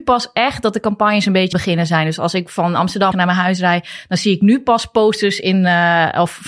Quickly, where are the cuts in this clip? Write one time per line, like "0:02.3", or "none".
0:01.5
0:03.1

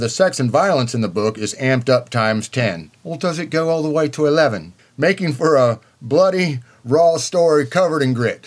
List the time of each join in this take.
0:03.0
0:04.8

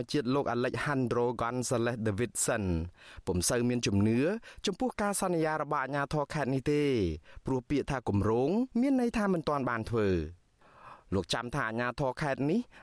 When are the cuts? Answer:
0:08.7

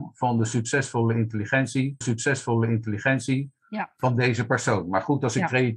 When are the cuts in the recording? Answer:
0:02.0

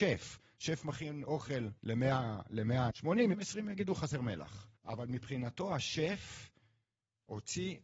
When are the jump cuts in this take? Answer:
0:01.8
0:02.9
0:03.3
0:04.8

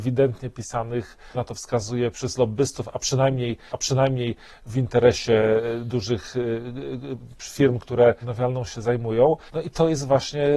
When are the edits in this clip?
0:01.3
0:02.1
0:03.7
0:08.2
0:09.5

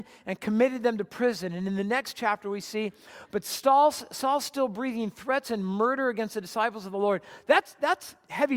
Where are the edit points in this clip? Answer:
none

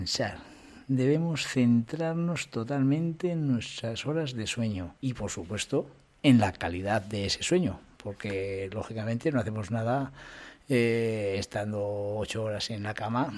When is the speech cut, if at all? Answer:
0:05.0

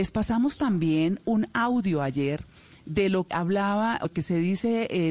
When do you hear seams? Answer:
0:03.3
0:04.0

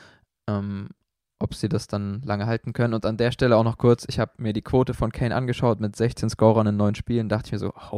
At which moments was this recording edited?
none

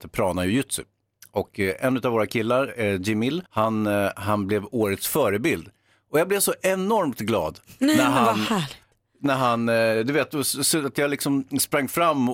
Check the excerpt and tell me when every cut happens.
0:03.5

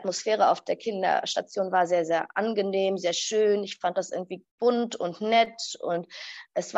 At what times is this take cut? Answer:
0:04.5

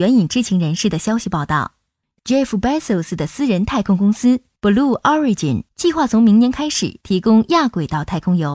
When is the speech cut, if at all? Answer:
none

